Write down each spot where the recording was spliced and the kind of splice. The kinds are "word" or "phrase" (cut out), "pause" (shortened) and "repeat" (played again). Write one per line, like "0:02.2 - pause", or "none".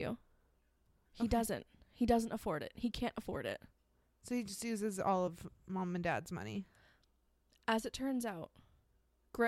none